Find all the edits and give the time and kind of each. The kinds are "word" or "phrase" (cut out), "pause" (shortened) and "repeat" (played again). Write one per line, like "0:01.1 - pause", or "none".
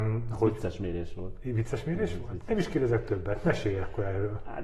none